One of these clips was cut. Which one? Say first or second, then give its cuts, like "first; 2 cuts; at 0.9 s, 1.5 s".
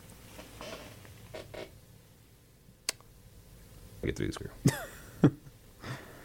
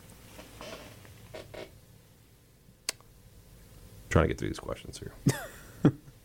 first; 2 cuts; at 4.0 s, 4.4 s